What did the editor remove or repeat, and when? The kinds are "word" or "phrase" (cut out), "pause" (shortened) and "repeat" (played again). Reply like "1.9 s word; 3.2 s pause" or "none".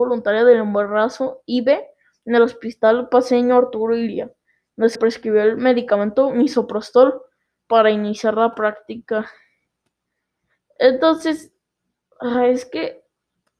4.9 s word